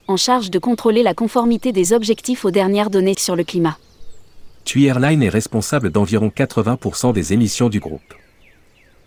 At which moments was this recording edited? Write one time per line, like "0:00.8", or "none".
0:03.1

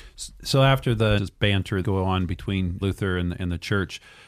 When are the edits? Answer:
0:01.2
0:01.8
0:02.8

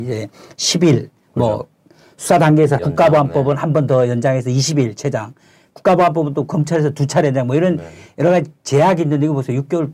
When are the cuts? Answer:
0:02.8

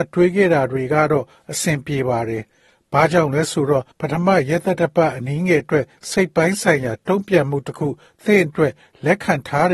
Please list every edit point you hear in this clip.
0:03.9

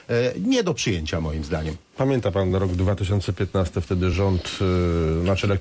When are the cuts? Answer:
none

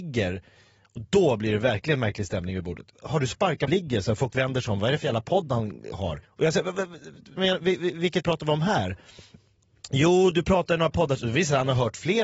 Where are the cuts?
0:02.9
0:03.7
0:06.2
0:07.4
0:08.2

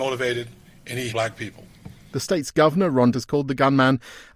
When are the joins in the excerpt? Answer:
0:01.1
0:03.1

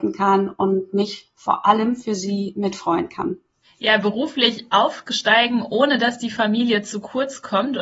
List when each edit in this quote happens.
none

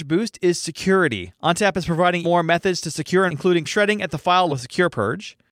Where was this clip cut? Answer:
0:02.2
0:03.3
0:03.7
0:04.5

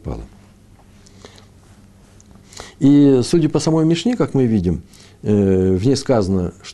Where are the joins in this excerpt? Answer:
none

